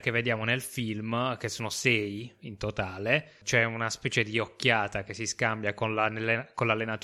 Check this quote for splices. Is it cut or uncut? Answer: uncut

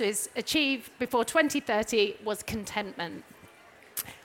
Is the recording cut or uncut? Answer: uncut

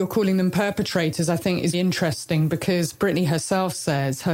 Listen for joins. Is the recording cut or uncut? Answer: cut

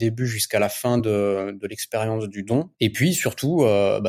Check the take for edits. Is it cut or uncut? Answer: uncut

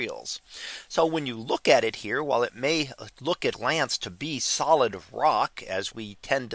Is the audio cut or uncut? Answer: cut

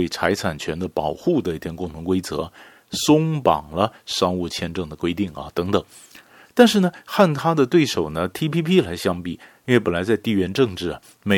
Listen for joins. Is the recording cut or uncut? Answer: uncut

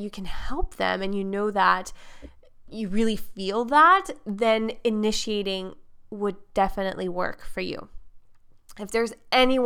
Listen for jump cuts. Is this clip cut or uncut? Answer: uncut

